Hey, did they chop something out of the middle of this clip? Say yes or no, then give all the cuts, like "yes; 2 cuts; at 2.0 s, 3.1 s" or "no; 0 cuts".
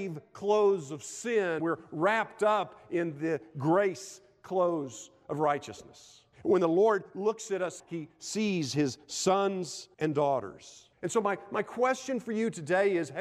yes; 5 cuts; at 1.6 s, 6.3 s, 7.8 s, 9.9 s, 10.9 s